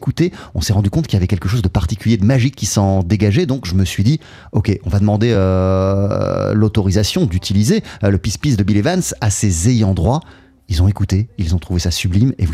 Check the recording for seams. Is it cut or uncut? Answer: uncut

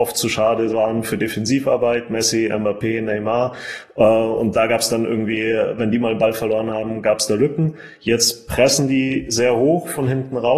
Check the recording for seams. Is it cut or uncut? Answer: uncut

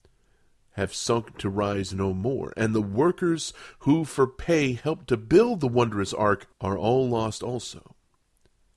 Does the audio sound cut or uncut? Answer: cut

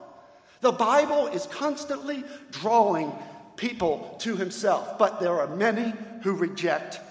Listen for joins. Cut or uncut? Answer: uncut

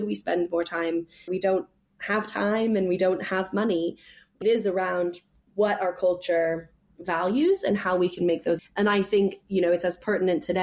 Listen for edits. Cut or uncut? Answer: cut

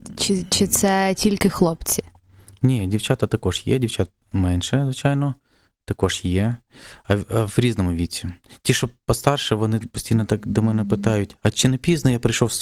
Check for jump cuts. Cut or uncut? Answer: uncut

